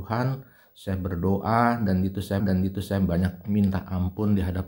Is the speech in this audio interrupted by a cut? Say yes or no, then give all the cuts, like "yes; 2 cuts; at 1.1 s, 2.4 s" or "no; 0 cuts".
yes; 1 cut; at 2.4 s